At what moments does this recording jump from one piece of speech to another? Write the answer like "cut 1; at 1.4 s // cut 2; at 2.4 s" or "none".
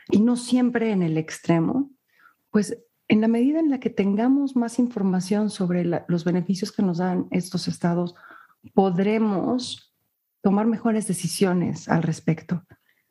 none